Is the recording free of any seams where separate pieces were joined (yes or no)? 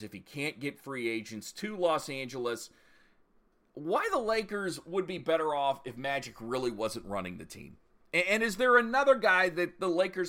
yes